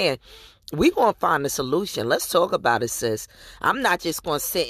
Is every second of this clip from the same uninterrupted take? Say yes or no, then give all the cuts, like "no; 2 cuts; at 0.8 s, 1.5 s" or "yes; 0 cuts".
yes; 0 cuts